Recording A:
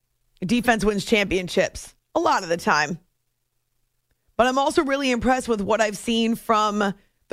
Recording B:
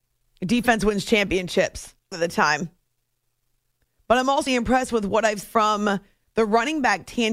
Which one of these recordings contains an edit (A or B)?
B